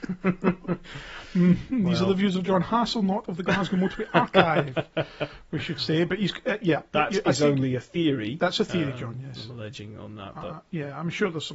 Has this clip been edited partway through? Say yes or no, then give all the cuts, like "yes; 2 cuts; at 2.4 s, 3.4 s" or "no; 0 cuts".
no; 0 cuts